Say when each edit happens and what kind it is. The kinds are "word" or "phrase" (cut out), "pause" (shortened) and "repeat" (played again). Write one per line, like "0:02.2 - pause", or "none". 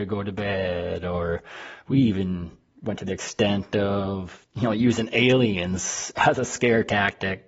none